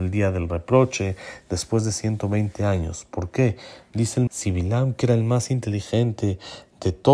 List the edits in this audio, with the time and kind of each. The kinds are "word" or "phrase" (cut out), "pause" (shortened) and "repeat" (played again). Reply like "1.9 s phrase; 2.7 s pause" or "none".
4.3 s word

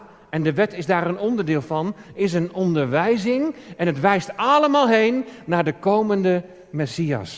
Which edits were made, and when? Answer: none

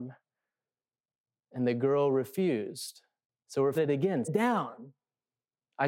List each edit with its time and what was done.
3.3 s pause; 3.8 s phrase; 4.2 s word

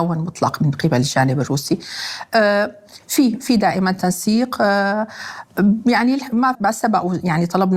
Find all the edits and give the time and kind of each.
6.5 s word

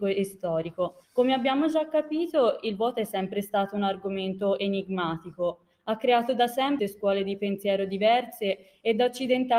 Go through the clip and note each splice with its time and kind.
1.0 s pause; 6.8 s word

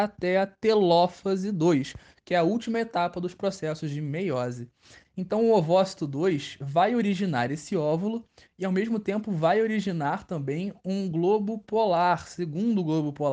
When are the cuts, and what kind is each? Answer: none

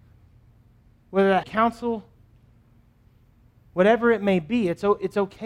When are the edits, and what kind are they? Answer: 1.4 s phrase

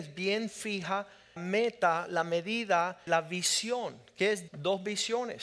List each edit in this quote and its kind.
1.4 s word; 3.1 s word; 4.5 s word

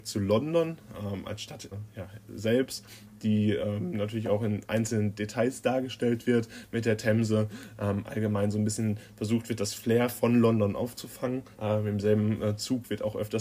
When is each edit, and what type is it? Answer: 1.7 s word; 11.5 s pause

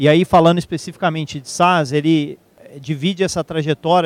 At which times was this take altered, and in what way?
none

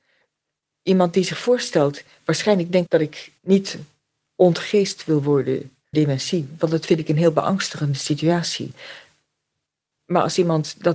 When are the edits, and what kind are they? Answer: 2.9 s word; 3.4 s pause; 5.9 s word

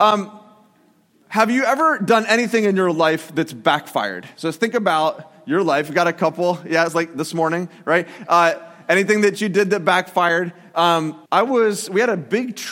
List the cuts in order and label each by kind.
11.2 s pause

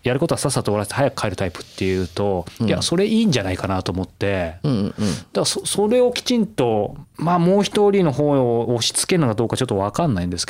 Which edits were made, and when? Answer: 7.1 s pause

